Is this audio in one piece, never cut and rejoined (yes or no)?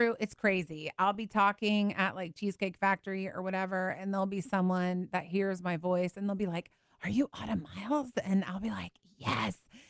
yes